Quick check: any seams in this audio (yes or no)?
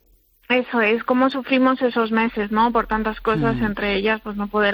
no